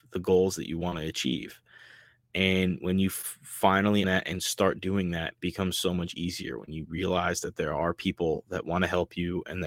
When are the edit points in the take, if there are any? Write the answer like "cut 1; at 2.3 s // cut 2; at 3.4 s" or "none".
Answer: cut 1; at 4.0 s // cut 2; at 5.4 s

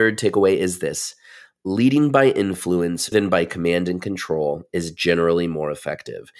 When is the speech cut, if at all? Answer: cut 1; at 3.1 s

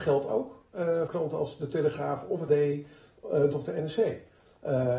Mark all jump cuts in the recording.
cut 1; at 1.1 s // cut 2; at 2.5 s // cut 3; at 3.5 s

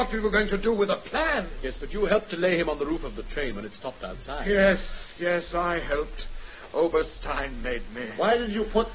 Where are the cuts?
none

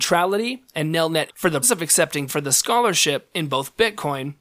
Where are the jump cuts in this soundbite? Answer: cut 1; at 1.3 s // cut 2; at 1.6 s // cut 3; at 2.3 s

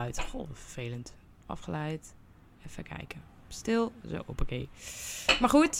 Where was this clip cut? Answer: none

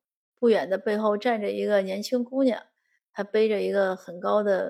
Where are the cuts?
none

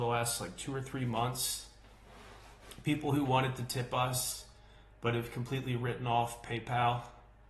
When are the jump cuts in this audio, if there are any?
none

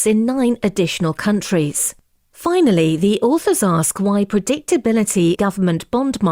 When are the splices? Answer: cut 1; at 5.4 s

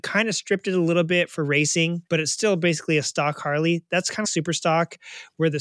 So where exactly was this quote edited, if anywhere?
cut 1; at 2.1 s // cut 2; at 4.2 s

